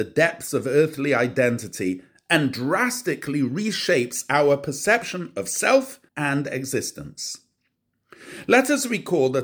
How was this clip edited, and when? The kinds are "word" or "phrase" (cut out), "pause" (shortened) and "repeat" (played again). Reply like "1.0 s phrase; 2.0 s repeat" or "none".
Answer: 6.1 s pause